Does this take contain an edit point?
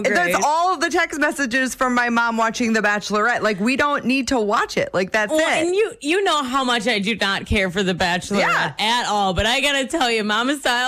no; 0 cuts

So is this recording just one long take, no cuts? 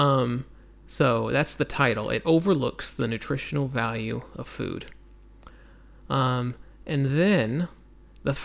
yes; 0 cuts

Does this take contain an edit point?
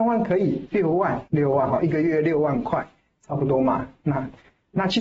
yes; 1 cut; at 1.3 s

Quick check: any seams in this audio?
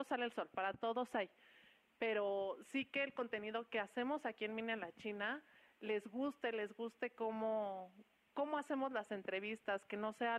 no; 0 cuts

